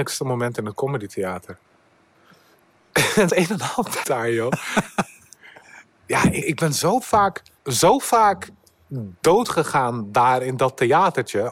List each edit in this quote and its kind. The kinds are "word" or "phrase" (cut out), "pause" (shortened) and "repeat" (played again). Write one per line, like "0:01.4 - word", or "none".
0:01.6 - pause
0:03.3 - word
0:04.0 - word
0:06.4 - word
0:07.6 - pause